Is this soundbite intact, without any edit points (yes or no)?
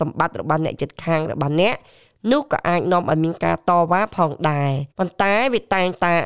no